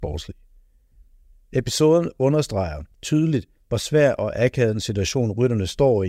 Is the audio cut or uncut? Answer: uncut